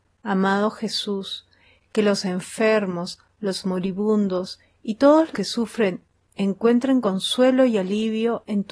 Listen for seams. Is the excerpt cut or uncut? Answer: cut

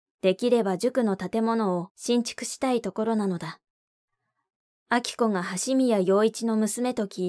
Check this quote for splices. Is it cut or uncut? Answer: uncut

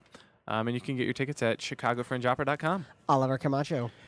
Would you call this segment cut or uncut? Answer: uncut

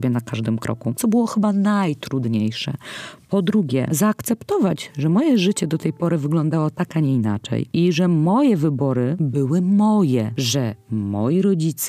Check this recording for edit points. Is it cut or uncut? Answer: uncut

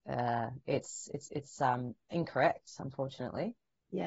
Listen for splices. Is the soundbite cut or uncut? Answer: cut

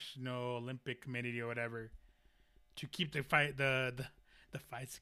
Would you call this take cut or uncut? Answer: uncut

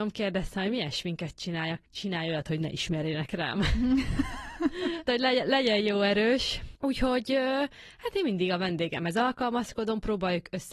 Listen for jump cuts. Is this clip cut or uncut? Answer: cut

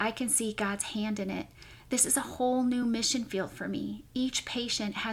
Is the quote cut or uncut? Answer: uncut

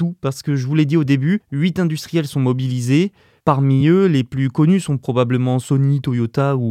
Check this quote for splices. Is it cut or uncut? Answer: uncut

